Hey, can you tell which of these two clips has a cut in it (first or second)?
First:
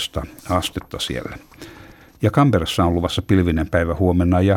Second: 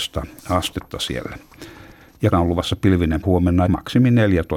second